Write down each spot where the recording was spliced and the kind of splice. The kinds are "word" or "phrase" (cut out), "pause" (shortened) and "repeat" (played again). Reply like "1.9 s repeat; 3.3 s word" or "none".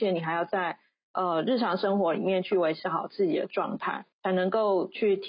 4.1 s pause